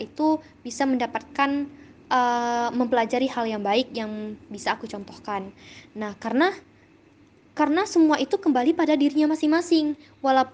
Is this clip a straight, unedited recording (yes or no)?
yes